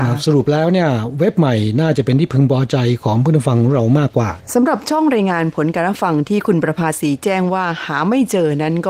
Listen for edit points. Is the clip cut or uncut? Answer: cut